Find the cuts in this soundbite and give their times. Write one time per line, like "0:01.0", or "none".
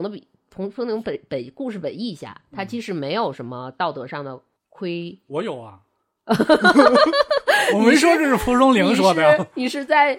0:04.6